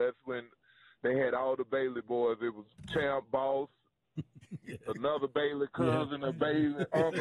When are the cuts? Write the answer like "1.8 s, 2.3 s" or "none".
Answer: 4.6 s